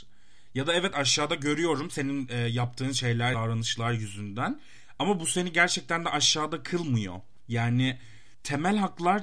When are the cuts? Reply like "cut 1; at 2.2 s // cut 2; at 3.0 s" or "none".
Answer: cut 1; at 3.3 s